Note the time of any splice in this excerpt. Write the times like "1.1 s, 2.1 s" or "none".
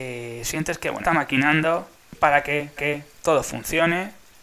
1.0 s, 2.8 s